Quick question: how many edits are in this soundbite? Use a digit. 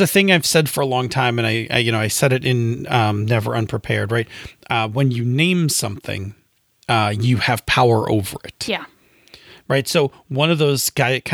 0